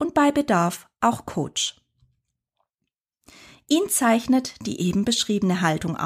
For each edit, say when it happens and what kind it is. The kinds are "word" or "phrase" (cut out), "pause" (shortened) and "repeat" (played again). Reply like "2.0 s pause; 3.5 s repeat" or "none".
none